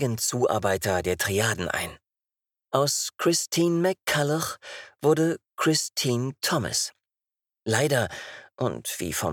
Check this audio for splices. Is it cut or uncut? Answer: uncut